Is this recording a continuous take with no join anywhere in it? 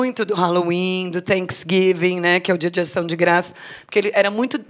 yes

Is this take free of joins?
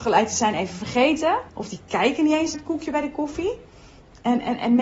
no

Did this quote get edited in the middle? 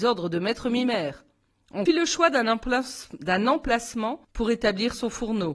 yes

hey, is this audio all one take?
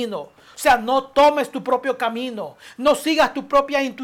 yes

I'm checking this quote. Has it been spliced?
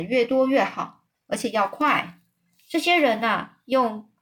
no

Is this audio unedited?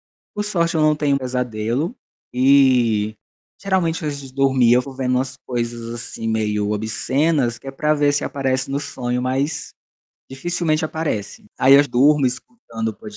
no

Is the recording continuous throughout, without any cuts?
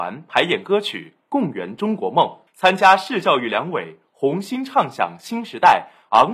no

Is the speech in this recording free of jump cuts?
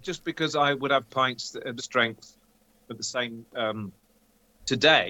no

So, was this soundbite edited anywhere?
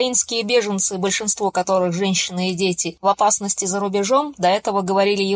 no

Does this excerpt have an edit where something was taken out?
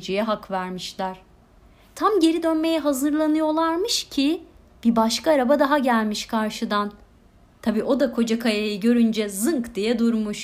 no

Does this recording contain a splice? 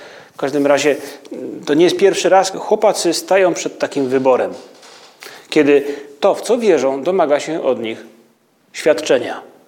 yes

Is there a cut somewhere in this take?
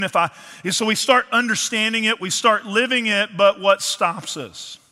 no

